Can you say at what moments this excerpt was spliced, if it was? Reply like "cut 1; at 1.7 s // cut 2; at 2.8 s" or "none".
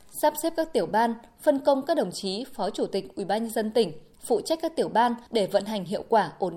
cut 1; at 5.3 s

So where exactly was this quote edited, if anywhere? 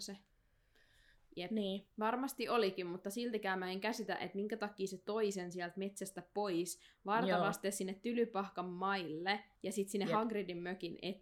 cut 1; at 1.9 s // cut 2; at 9.6 s

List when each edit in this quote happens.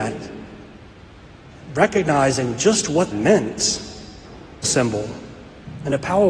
cut 1; at 3.1 s // cut 2; at 4.6 s

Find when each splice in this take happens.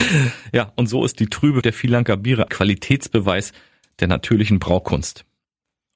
cut 1; at 1.6 s // cut 2; at 2.5 s

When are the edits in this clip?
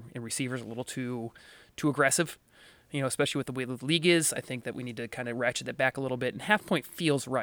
none

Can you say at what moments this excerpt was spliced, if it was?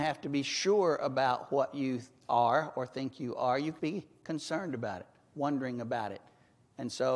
cut 1; at 3.8 s

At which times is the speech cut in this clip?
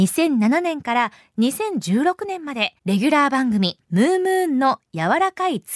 cut 1; at 2.8 s // cut 2; at 3.8 s

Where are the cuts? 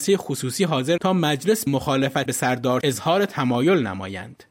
cut 1; at 1.0 s // cut 2; at 1.7 s // cut 3; at 2.3 s // cut 4; at 2.8 s

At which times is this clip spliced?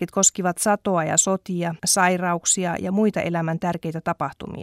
cut 1; at 1.8 s

